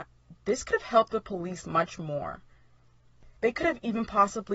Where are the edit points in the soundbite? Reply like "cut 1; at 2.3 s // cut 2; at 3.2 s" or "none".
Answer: cut 1; at 3.4 s